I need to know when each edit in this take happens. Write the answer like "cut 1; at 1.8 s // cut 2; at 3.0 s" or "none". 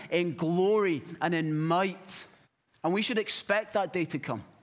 cut 1; at 2.4 s